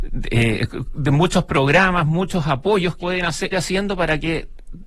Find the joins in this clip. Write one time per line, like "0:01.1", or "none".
0:03.0
0:03.5